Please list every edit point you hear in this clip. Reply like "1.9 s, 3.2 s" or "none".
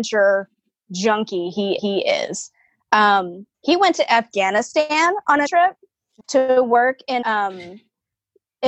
1.8 s, 3.5 s, 5.5 s, 6.2 s, 7.2 s

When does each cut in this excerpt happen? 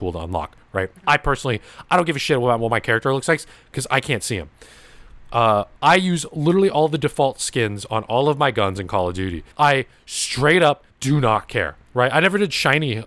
9.5 s, 10.9 s, 11.8 s

